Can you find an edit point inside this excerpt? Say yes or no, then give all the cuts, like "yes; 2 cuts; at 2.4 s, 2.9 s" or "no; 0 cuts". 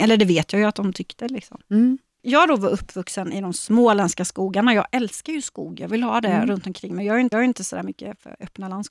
yes; 1 cut; at 7.3 s